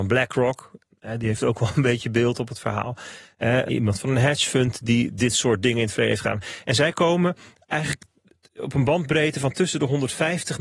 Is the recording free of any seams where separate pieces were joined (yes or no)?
no